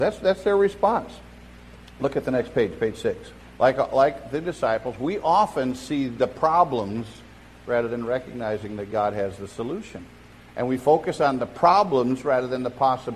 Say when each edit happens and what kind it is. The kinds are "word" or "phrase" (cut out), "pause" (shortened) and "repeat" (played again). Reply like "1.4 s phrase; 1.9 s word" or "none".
none